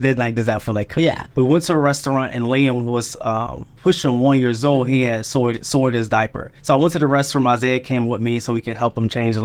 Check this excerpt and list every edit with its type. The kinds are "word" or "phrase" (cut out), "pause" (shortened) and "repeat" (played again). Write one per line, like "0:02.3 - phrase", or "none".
0:01.3 - pause
0:03.8 - pause
0:06.6 - pause